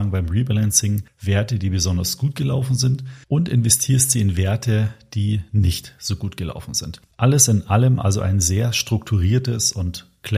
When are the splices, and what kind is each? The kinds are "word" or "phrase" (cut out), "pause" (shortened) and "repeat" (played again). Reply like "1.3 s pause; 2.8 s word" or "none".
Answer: 3.2 s pause